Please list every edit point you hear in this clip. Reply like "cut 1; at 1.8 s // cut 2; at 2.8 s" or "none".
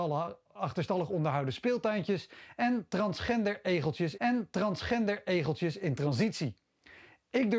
cut 1; at 4.2 s